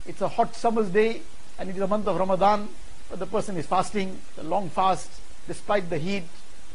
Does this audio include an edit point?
no; 0 cuts

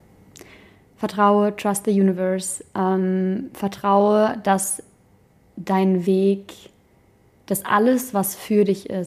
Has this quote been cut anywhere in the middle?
no; 0 cuts

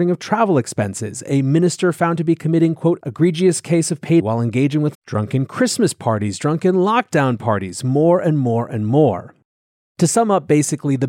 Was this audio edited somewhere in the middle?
yes; 2 cuts; at 4.2 s, 4.9 s

